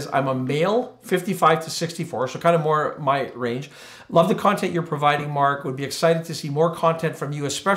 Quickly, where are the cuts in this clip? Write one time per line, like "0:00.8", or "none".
none